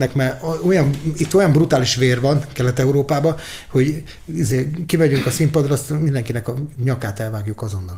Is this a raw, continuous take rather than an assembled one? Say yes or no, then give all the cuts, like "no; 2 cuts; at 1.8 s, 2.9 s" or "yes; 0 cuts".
yes; 0 cuts